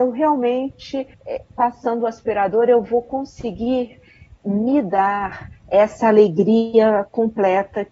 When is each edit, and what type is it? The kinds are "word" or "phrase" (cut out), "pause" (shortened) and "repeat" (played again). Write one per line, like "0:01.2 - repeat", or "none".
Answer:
0:01.1 - pause